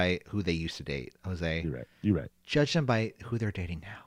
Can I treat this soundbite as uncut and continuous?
no; 1 cut; at 1.9 s

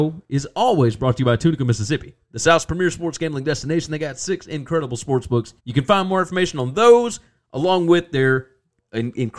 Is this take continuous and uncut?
no; 1 cut; at 5.6 s

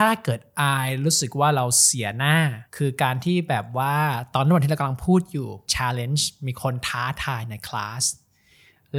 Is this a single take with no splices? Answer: no; 2 cuts; at 2.7 s, 5.7 s

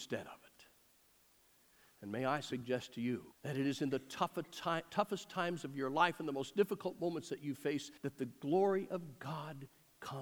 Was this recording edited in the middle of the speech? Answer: yes; 2 cuts; at 3.3 s, 8.0 s

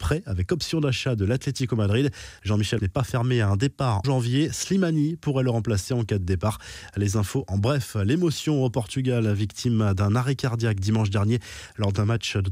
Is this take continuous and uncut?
no; 2 cuts; at 2.8 s, 4.0 s

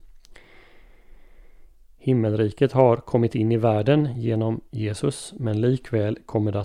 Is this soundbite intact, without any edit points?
yes; 0 cuts

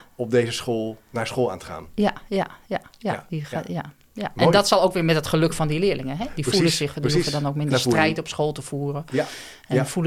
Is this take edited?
no; 0 cuts

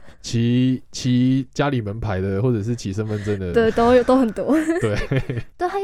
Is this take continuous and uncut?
yes; 0 cuts

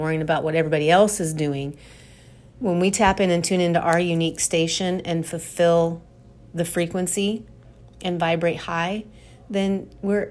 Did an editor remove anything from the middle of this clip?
no; 0 cuts

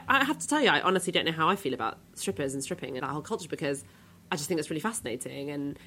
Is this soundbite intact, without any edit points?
no; 1 cut; at 3.0 s

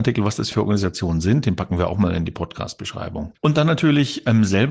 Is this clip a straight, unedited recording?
yes; 0 cuts

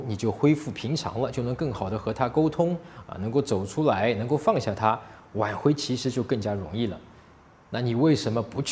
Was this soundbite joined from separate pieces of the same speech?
no; 0 cuts

